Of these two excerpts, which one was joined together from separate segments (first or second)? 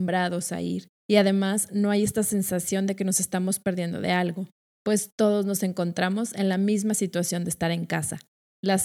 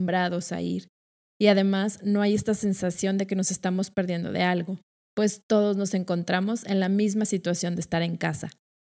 first